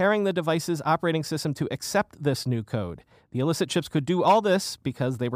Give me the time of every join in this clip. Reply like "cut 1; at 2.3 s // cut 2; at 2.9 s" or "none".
cut 1; at 3.1 s